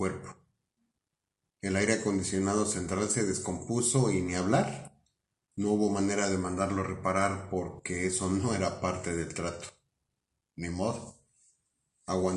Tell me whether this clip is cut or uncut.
uncut